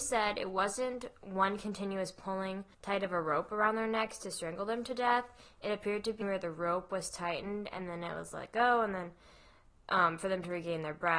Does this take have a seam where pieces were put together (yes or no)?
yes